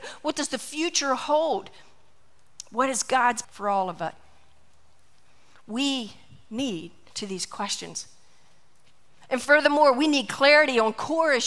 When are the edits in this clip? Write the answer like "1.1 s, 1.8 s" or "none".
3.4 s, 7.1 s